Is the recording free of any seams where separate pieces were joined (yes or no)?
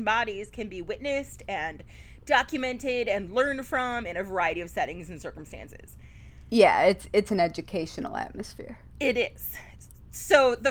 yes